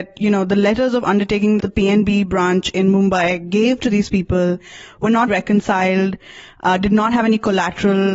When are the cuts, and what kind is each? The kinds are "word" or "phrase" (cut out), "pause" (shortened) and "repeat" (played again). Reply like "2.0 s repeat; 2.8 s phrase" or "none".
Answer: 1.6 s word; 5.3 s word

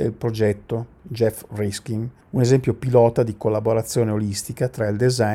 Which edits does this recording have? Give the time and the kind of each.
2.2 s pause

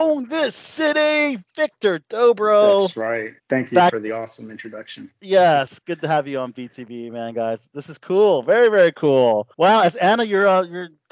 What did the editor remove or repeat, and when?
3.4 s pause; 9.5 s pause

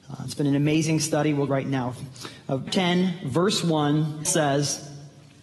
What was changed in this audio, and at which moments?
1.5 s word; 2.7 s word; 4.3 s word

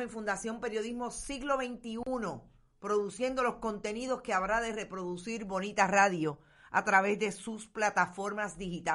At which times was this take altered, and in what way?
none

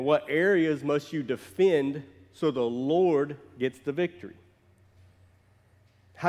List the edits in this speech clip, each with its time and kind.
none

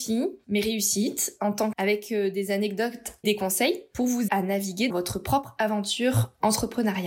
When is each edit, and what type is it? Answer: 1.7 s word; 3.2 s word; 4.3 s word; 4.9 s word

